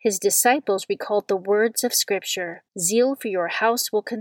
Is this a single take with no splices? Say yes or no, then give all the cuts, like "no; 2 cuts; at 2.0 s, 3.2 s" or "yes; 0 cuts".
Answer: no; 1 cut; at 2.7 s